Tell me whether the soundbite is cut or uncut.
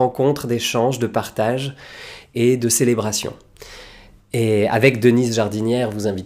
uncut